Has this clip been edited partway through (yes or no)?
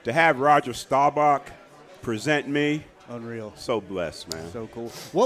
no